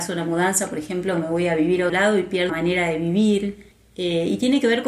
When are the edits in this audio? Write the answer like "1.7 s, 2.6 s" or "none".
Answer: 1.9 s, 2.5 s, 3.7 s